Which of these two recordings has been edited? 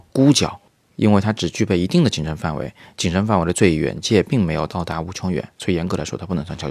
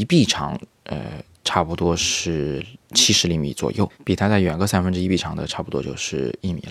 second; 1 cut; at 3.9 s

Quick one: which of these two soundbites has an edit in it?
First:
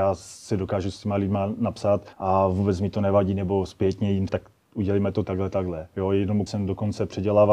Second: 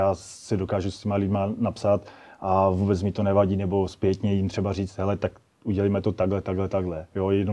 first; 4 cuts; at 2.1 s, 4.3 s, 5.2 s, 6.5 s

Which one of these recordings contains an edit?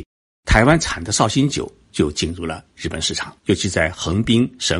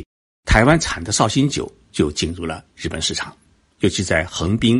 first; 1 cut; at 3.4 s

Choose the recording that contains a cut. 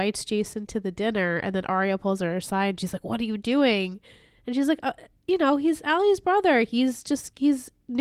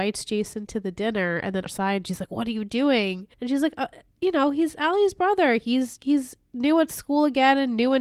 second; 3 cuts; at 1.7 s, 3.3 s, 6.0 s

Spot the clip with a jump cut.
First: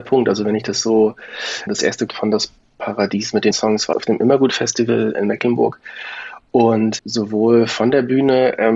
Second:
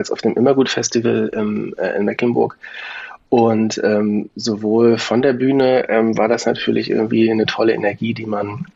first; 6 cuts; at 1.7 s, 2.1 s, 3.5 s, 3.9 s, 5.1 s, 7.0 s

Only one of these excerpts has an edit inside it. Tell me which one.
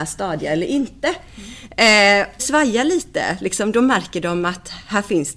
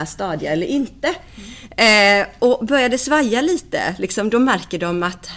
first; 1 cut; at 2.4 s

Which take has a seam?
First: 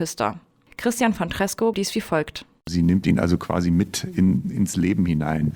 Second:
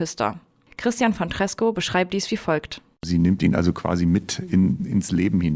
first; 1 cut; at 1.7 s

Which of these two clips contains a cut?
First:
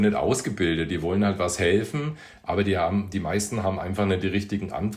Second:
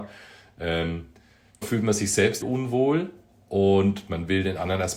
second; 2 cuts; at 1.6 s, 2.4 s

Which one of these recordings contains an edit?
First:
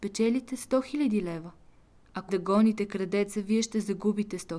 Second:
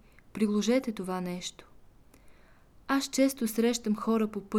first; 1 cut; at 2.3 s

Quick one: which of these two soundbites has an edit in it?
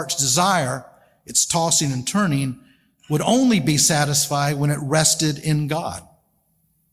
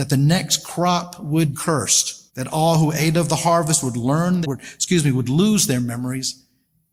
second; 3 cuts; at 1.5 s, 2.3 s, 4.4 s

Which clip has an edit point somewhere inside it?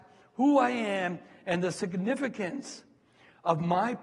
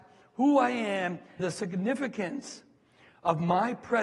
second; 1 cut; at 1.4 s

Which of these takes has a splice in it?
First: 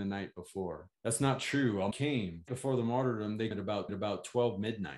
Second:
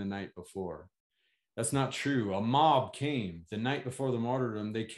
first; 5 cuts; at 0.9 s, 1.9 s, 2.5 s, 3.5 s, 3.9 s

